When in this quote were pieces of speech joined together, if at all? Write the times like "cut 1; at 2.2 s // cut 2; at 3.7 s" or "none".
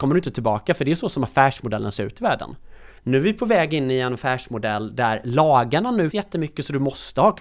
cut 1; at 3.0 s // cut 2; at 6.1 s